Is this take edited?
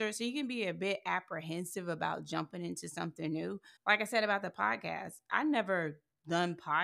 yes; 1 cut; at 3.8 s

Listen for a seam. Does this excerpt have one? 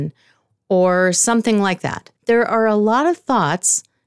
yes; 1 cut; at 2.2 s

